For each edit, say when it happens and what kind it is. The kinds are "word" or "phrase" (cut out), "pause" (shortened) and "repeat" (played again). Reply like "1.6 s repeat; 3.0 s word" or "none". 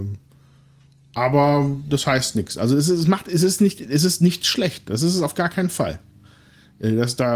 none